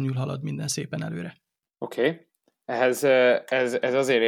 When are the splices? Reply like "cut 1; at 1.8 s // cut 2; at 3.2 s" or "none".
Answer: none